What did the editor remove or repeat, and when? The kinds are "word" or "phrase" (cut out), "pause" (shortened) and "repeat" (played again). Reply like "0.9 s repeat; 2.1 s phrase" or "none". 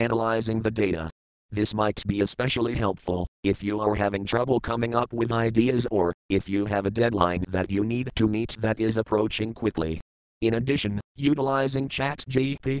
none